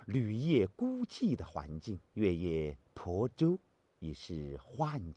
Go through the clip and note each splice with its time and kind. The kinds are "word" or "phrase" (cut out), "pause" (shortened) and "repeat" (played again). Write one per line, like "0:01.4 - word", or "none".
0:02.1 - pause